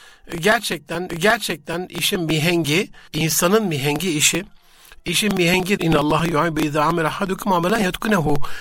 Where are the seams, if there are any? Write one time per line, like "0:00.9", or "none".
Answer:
0:01.1
0:03.1
0:05.8